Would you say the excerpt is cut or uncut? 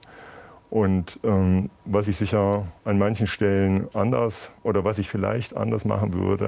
cut